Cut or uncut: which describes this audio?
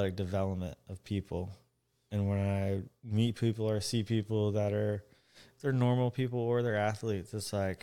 uncut